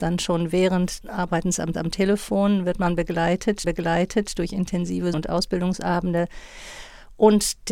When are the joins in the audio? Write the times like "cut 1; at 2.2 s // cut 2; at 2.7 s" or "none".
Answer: cut 1; at 1.0 s // cut 2; at 1.7 s // cut 3; at 3.6 s // cut 4; at 5.1 s